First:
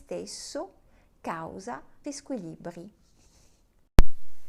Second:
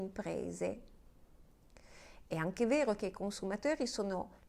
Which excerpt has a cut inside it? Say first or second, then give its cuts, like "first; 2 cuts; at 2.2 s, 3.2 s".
first; 1 cut; at 2.0 s